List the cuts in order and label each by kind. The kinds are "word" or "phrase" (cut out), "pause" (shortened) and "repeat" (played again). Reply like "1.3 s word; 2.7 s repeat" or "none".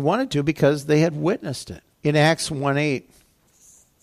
1.9 s pause